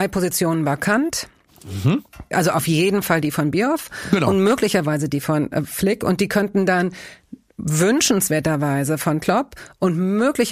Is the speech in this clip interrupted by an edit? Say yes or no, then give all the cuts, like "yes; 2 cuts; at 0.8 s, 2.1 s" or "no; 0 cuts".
no; 0 cuts